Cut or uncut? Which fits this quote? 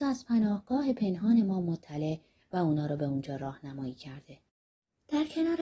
uncut